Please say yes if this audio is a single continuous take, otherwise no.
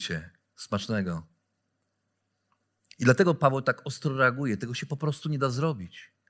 yes